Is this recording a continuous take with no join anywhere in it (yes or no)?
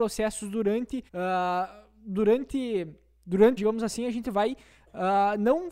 no